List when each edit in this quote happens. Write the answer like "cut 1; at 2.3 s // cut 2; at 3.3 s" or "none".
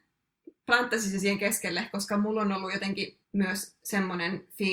cut 1; at 3.2 s

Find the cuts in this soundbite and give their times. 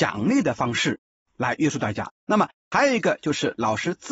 cut 1; at 2.1 s

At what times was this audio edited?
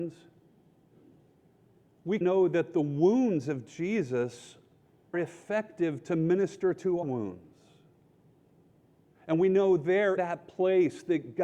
cut 1; at 2.2 s // cut 2; at 5.1 s // cut 3; at 7.0 s // cut 4; at 10.2 s

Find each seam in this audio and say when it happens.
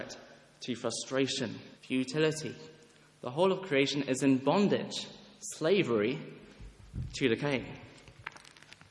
cut 1; at 1.8 s

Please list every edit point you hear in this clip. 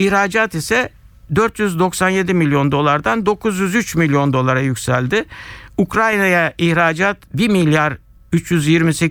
none

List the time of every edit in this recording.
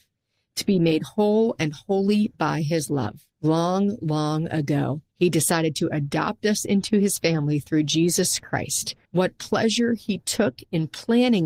cut 1; at 3.3 s // cut 2; at 5.1 s // cut 3; at 9.0 s

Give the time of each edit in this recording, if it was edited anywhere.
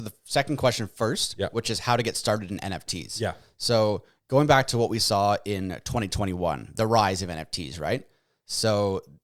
none

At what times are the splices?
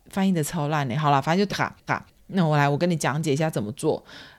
cut 1; at 1.5 s // cut 2; at 1.9 s

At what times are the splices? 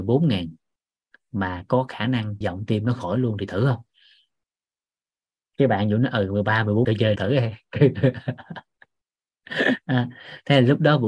cut 1; at 2.4 s // cut 2; at 6.8 s // cut 3; at 7.2 s

